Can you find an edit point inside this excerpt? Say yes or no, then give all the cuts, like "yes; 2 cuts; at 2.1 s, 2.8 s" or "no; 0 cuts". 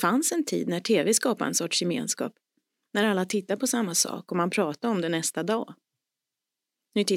no; 0 cuts